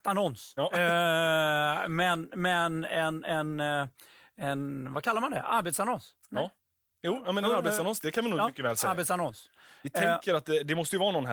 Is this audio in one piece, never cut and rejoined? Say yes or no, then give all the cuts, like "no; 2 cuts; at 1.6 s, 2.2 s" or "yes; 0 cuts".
yes; 0 cuts